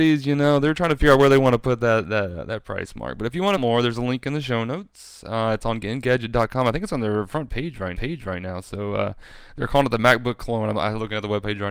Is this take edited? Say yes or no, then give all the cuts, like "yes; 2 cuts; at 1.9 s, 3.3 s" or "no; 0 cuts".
yes; 2 cuts; at 3.6 s, 7.9 s